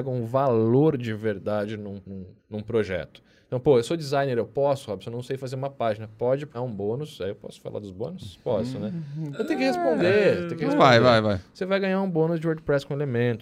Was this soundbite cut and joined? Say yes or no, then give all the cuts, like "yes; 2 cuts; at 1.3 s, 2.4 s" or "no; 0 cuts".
yes; 3 cuts; at 2.0 s, 2.4 s, 6.5 s